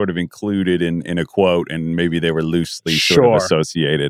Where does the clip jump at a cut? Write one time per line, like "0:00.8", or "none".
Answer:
none